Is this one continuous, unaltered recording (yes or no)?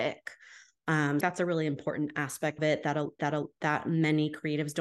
no